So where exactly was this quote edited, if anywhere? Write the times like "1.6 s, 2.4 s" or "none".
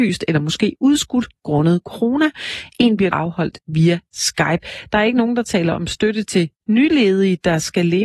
3.1 s